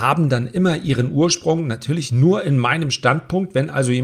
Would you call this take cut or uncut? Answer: uncut